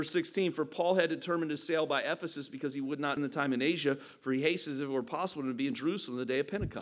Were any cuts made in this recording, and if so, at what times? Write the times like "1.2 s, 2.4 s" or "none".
3.2 s